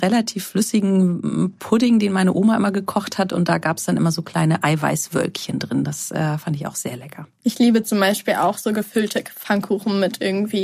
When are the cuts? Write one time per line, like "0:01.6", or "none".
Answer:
none